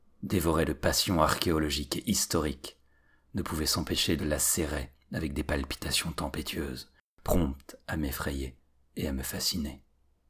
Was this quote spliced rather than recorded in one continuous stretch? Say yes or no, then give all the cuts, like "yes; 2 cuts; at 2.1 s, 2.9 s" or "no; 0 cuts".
yes; 1 cut; at 4.2 s